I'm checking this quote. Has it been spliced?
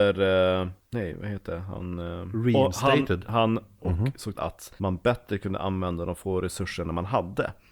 yes; 3 cuts; at 3.8 s, 4.3 s, 4.8 s

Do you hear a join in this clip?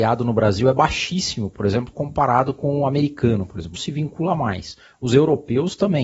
yes; 2 cuts; at 1.9 s, 3.7 s

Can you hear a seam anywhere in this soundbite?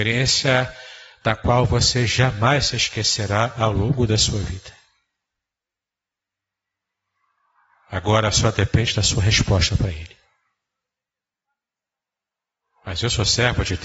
no; 0 cuts

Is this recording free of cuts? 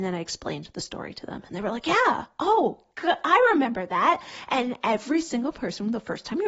yes; 0 cuts

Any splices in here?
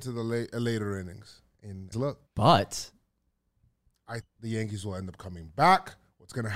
yes; 3 cuts; at 1.9 s, 2.3 s, 4.2 s

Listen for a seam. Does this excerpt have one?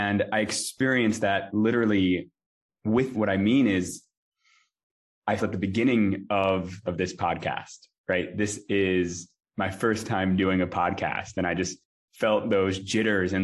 yes; 4 cuts; at 3.1 s, 5.4 s, 6.9 s, 9.4 s

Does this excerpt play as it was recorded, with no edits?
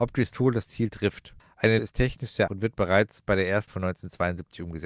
no; 3 cuts; at 1.8 s, 2.5 s, 3.7 s

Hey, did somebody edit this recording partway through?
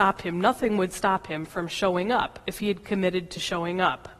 no; 0 cuts

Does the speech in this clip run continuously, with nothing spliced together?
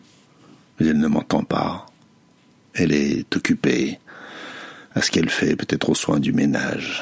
yes; 0 cuts

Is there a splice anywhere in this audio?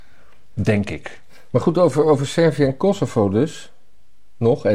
no; 0 cuts

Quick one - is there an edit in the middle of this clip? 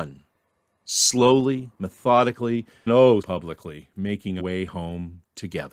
yes; 3 cuts; at 2.9 s, 3.2 s, 4.4 s

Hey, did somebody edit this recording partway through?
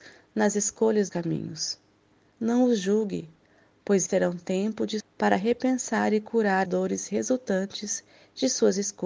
yes; 4 cuts; at 1.1 s, 4.1 s, 5.0 s, 6.7 s

